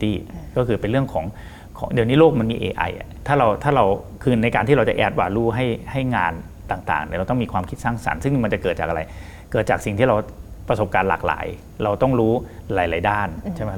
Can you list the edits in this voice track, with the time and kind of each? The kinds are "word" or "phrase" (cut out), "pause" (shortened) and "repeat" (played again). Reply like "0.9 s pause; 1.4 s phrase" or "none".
none